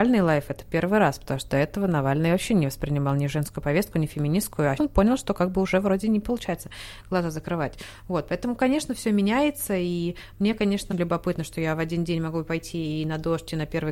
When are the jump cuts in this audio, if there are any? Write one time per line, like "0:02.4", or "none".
0:04.8
0:10.9